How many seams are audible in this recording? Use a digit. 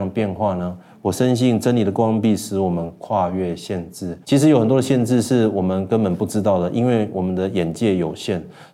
1